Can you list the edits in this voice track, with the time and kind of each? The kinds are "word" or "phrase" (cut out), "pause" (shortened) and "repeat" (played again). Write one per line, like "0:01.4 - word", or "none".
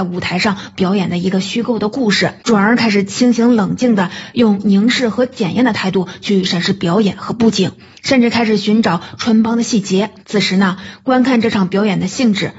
0:02.4 - pause
0:10.2 - pause